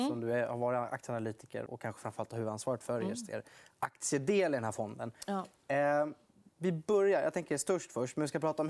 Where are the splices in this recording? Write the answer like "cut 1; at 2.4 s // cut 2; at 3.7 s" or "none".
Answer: cut 1; at 1.7 s